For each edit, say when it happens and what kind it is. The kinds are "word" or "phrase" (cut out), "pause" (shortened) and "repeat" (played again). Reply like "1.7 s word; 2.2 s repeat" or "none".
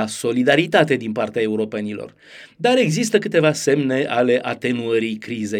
none